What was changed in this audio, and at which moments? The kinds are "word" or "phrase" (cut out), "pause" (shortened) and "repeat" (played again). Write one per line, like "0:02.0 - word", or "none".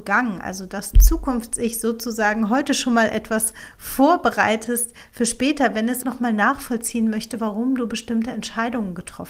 0:00.9 - phrase
0:06.0 - word